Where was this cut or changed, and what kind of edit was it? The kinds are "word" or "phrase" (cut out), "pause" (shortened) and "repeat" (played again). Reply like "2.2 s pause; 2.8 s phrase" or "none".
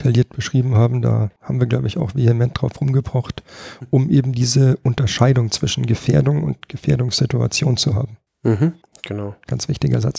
1.4 s pause; 8.8 s pause